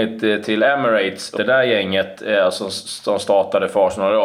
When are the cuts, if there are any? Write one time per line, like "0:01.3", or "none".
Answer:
0:01.4